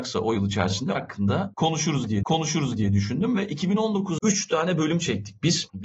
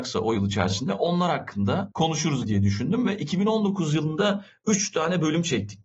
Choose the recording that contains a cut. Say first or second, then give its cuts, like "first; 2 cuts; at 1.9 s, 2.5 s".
first; 3 cuts; at 0.9 s, 2.2 s, 4.2 s